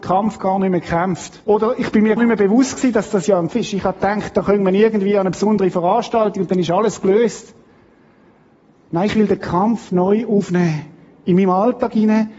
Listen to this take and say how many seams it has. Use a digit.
3